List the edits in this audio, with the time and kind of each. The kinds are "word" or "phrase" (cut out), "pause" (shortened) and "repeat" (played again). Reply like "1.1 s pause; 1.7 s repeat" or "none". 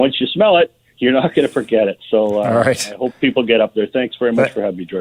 none